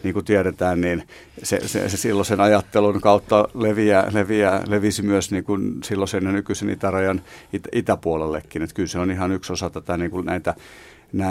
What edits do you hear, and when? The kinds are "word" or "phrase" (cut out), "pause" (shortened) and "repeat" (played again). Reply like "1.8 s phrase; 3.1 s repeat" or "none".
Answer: none